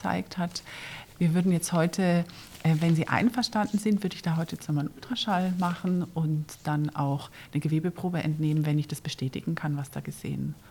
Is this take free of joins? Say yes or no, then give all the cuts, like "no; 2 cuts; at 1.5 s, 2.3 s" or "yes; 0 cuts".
yes; 0 cuts